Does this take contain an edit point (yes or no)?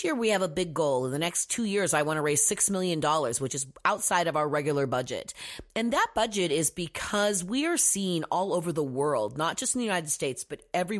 no